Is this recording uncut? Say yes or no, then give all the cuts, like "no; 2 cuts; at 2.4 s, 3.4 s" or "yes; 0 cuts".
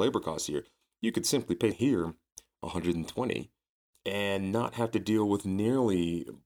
no; 1 cut; at 1.7 s